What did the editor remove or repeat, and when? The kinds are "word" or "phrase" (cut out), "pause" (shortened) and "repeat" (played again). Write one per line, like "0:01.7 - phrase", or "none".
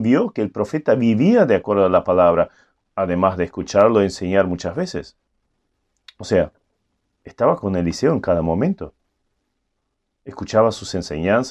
none